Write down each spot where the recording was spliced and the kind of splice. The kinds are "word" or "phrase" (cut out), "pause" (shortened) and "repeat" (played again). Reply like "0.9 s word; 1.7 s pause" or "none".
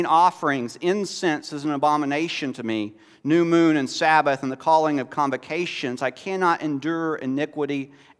none